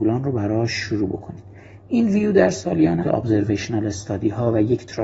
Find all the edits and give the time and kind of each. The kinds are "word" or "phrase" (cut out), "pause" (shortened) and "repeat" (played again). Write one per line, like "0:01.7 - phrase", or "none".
0:03.0 - phrase